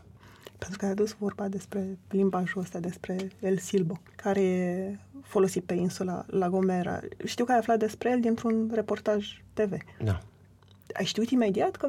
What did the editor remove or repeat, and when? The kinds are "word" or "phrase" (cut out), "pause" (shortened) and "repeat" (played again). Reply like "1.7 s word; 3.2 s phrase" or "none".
4.1 s pause; 9.9 s pause